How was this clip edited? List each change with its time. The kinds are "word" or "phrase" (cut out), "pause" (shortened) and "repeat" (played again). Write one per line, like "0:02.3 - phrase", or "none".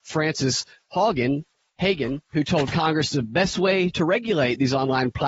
none

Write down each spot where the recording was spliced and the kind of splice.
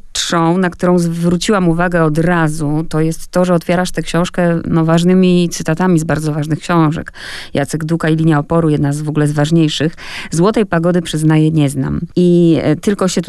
none

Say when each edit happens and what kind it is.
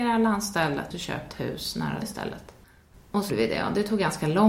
0:00.9 - word
0:01.3 - word
0:02.0 - word
0:03.3 - word

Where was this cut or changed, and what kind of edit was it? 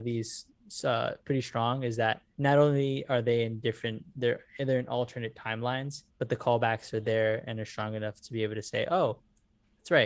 0:02.3 - pause
0:06.1 - pause

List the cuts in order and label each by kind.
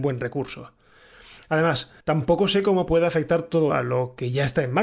0:02.0 - pause
0:03.7 - word

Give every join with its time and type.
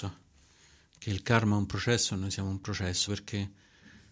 0:03.1 - word

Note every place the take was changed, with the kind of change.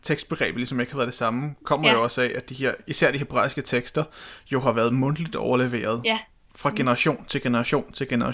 none

